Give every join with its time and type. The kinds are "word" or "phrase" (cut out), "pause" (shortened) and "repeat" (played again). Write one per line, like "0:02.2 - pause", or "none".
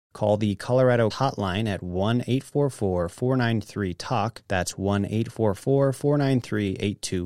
0:01.1 - phrase
0:04.5 - pause